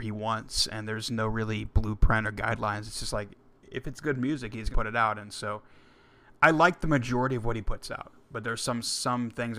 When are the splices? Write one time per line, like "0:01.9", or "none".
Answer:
0:04.7